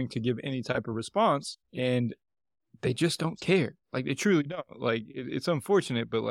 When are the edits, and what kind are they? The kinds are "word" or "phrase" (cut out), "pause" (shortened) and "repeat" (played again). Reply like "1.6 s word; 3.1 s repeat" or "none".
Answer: 1.6 s pause; 3.8 s pause